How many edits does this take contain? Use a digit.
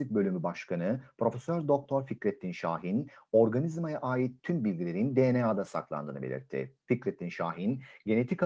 1